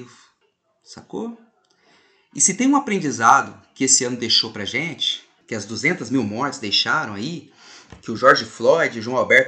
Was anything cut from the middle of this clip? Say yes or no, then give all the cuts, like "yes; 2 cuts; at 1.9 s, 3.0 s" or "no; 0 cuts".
no; 0 cuts